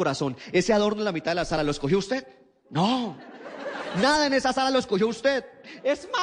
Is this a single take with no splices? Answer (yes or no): yes